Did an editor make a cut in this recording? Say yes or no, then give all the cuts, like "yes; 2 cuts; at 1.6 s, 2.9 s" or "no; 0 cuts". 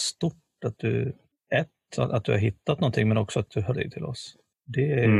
yes; 1 cut; at 3.7 s